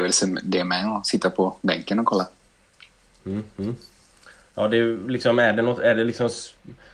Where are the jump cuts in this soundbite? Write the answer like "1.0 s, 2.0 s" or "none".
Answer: none